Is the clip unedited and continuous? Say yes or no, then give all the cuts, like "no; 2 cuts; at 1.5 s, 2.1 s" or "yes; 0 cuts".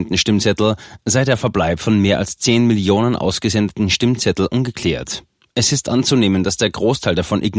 yes; 0 cuts